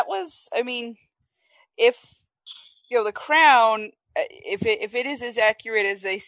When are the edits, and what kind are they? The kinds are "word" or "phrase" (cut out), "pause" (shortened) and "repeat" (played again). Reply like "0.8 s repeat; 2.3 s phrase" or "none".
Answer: none